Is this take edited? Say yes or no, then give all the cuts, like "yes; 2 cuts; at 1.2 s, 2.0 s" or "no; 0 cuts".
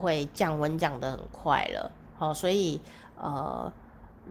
no; 0 cuts